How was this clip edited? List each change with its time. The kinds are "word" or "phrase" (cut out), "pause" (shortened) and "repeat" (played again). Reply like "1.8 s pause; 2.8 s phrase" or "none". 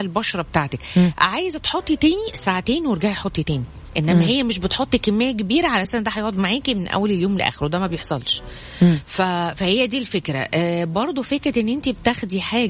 none